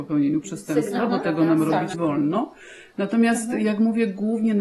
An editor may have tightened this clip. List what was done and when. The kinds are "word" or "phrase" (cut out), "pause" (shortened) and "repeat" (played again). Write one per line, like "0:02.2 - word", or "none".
0:01.9 - word